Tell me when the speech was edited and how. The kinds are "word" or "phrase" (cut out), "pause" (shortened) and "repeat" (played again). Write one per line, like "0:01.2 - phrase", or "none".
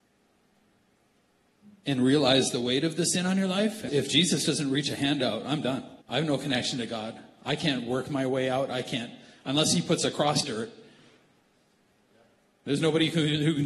0:03.9 - word
0:06.0 - pause
0:10.4 - phrase